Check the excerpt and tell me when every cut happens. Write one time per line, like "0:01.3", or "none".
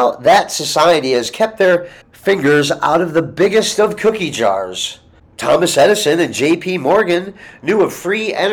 0:02.0